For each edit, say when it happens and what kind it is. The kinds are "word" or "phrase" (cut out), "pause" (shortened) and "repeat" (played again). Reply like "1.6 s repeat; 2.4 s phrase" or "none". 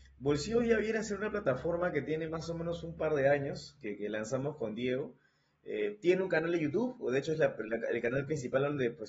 none